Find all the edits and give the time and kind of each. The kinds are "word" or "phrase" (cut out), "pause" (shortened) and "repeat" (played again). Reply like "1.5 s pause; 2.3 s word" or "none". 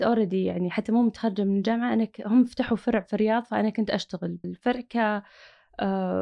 4.4 s word

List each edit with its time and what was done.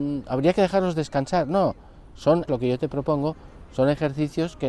2.5 s word

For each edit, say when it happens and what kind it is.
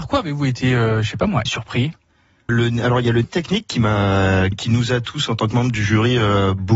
1.5 s word; 2.5 s word; 3.2 s word; 4.5 s word

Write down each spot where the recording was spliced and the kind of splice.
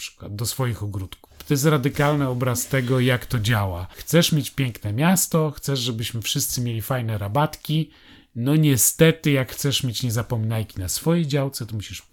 none

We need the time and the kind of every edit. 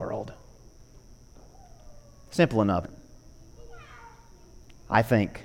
2.8 s word

